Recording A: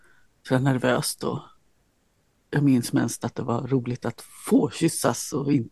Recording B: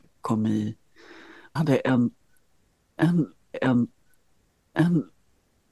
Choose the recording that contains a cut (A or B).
B